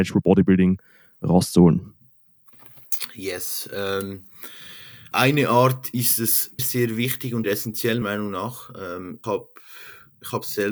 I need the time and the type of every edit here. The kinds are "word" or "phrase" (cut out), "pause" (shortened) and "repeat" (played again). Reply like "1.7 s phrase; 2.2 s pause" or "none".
5.1 s word; 6.6 s word; 7.4 s word; 8.0 s word; 9.2 s word